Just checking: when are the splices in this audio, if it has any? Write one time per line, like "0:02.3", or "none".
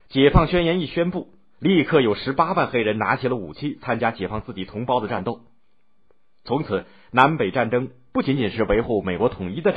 none